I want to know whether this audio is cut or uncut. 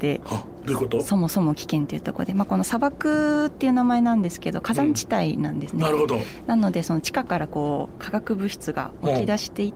uncut